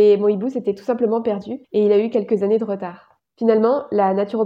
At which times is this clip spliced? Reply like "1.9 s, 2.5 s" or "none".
1.6 s, 3.2 s